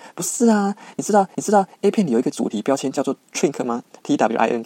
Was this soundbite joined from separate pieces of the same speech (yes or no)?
yes